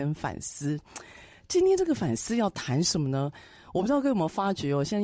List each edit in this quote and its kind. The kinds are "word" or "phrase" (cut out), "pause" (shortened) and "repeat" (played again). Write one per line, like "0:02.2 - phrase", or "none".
none